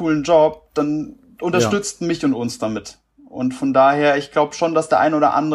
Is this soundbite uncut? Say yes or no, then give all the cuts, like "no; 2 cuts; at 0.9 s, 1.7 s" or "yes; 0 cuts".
yes; 0 cuts